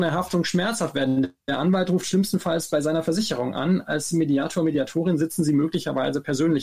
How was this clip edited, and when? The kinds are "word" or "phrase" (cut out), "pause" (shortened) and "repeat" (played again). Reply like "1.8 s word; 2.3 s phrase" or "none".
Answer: none